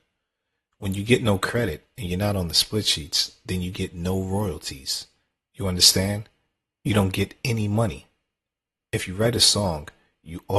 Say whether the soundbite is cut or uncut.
uncut